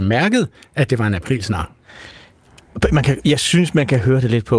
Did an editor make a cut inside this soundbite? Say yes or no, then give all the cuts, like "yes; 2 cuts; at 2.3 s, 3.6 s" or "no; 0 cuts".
no; 0 cuts